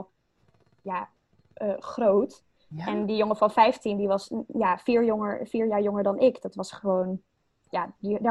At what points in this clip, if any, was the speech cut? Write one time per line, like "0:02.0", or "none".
none